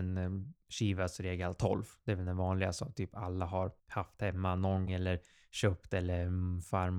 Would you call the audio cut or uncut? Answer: cut